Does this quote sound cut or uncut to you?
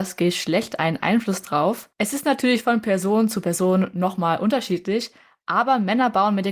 cut